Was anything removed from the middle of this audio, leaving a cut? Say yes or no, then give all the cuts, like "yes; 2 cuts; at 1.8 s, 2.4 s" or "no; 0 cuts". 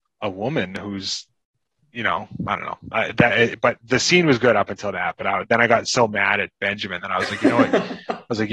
no; 0 cuts